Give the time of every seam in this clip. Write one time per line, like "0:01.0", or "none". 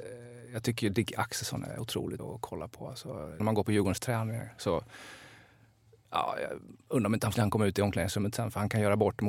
0:02.2
0:03.4
0:07.3